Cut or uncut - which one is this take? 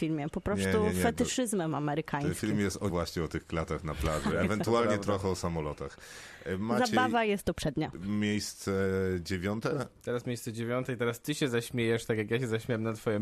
cut